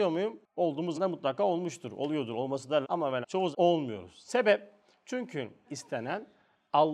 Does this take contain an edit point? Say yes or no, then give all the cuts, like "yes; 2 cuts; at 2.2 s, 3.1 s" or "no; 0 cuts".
yes; 5 cuts; at 0.9 s, 2.8 s, 3.2 s, 3.5 s, 5.6 s